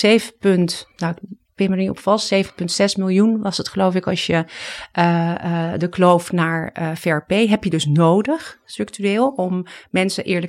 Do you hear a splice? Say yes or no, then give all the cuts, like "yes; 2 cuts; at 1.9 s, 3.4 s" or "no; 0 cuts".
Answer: yes; 1 cut; at 0.9 s